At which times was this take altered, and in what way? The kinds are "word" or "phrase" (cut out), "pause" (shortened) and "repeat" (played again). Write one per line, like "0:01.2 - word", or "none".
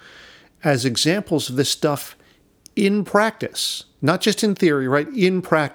none